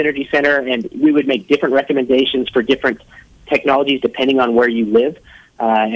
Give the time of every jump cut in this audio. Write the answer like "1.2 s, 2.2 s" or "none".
none